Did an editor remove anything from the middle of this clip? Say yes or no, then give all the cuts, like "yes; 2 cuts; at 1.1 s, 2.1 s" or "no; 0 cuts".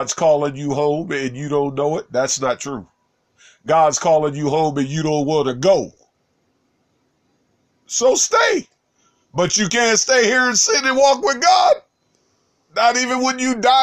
no; 0 cuts